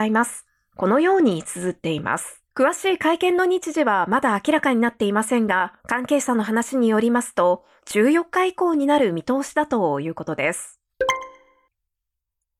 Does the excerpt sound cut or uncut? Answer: cut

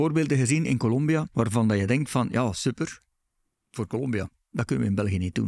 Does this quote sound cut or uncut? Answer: uncut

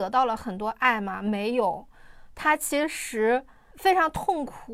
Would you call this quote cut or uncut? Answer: uncut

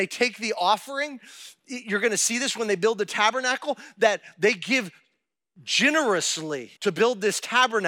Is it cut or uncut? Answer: cut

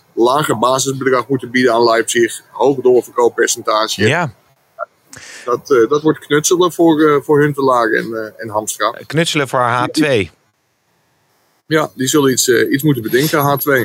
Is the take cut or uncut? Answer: uncut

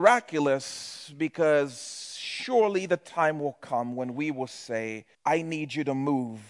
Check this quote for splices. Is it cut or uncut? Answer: cut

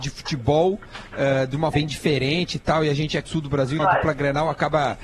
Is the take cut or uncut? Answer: cut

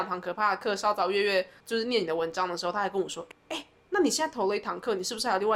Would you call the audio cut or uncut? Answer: cut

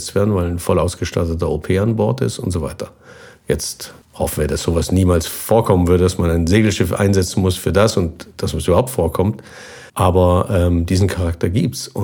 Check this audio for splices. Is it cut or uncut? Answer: cut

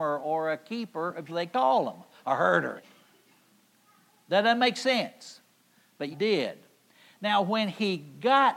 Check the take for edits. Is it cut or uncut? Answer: cut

